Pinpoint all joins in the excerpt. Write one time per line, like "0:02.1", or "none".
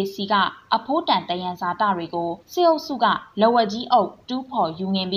0:02.4